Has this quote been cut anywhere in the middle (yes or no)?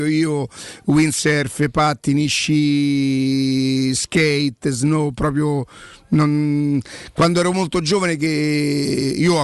no